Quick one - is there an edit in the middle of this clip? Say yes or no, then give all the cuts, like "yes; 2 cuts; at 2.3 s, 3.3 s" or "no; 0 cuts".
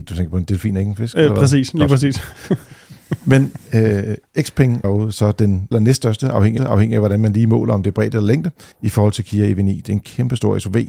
yes; 4 cuts; at 4.8 s, 5.7 s, 6.6 s, 8.7 s